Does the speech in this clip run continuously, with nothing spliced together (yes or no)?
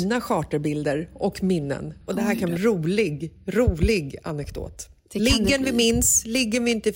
no